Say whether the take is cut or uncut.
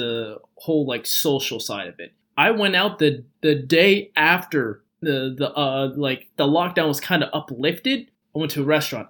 uncut